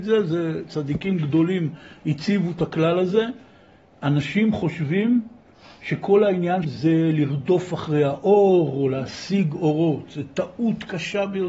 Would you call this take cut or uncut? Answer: cut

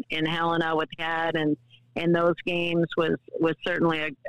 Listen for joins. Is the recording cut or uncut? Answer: cut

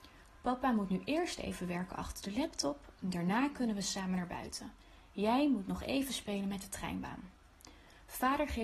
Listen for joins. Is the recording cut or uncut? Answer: uncut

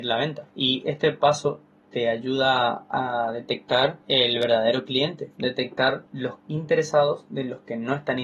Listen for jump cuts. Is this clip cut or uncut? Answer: uncut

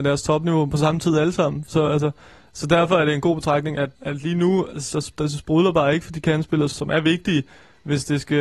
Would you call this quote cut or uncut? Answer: cut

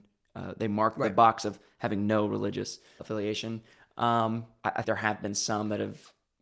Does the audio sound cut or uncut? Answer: cut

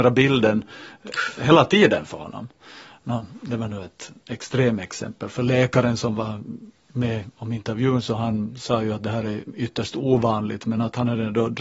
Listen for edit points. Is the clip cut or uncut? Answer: uncut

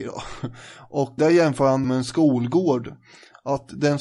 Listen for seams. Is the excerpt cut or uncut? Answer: cut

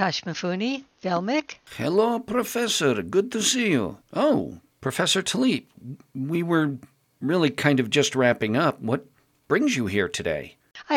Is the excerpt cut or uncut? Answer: uncut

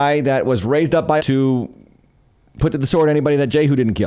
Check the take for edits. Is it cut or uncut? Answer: cut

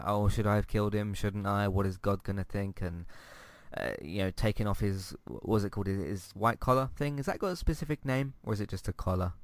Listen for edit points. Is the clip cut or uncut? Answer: uncut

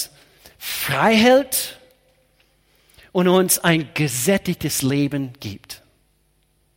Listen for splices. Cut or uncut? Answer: uncut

